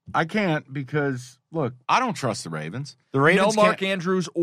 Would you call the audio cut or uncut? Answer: cut